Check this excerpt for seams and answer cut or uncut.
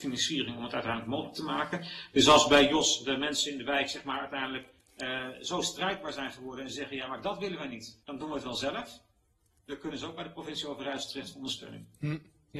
cut